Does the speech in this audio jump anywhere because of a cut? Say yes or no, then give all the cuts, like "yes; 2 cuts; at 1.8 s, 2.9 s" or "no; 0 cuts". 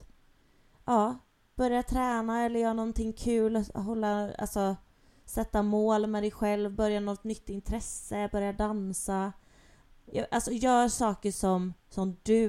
no; 0 cuts